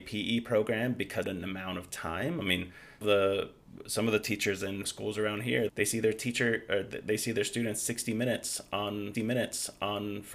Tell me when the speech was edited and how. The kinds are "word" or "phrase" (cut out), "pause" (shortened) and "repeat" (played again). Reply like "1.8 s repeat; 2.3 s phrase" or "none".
1.2 s phrase; 3.0 s phrase; 4.8 s phrase; 5.7 s word; 9.1 s repeat